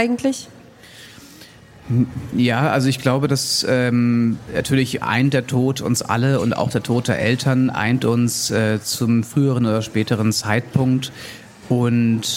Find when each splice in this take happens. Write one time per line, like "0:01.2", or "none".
0:11.5